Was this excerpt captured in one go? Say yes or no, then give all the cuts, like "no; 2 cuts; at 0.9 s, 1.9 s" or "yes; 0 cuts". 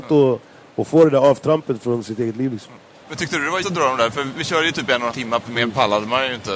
no; 4 cuts; at 3.6 s, 4.3 s, 5.1 s, 5.5 s